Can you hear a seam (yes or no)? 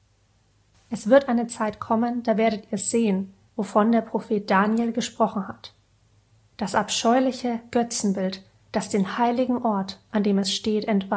no